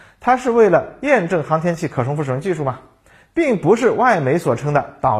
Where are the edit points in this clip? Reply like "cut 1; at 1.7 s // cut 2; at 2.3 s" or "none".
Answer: none